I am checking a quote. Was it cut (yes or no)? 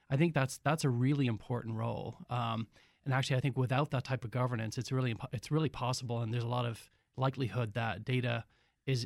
no